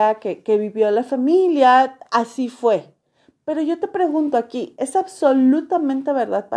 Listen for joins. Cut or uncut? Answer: uncut